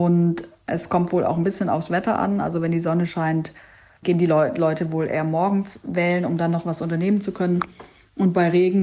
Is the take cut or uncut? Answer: uncut